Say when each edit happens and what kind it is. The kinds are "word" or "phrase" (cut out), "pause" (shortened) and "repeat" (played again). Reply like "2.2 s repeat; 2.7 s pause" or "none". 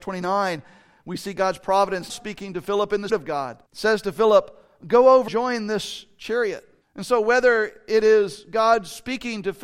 2.1 s word; 3.1 s word; 3.7 s pause; 5.3 s word; 6.8 s pause